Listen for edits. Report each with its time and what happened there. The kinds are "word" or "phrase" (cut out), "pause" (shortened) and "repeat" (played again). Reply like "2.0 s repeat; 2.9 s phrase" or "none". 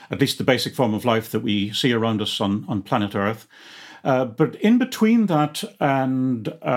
none